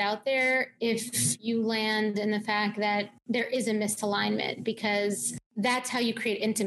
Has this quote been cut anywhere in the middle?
no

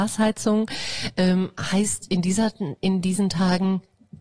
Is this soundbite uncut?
yes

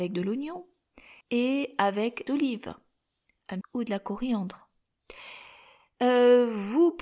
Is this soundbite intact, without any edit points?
no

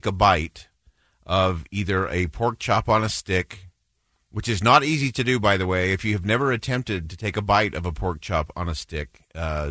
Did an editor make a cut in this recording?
no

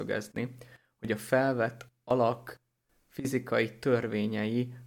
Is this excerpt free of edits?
yes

